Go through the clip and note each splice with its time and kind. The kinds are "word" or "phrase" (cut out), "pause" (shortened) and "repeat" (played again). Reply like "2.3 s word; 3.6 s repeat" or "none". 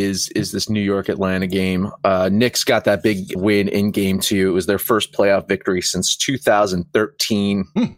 3.3 s word